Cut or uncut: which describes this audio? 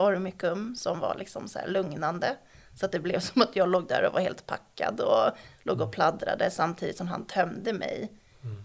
uncut